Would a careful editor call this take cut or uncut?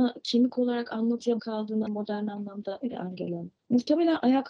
cut